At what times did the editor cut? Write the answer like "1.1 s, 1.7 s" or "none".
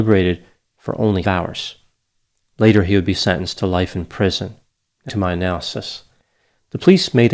1.2 s, 5.1 s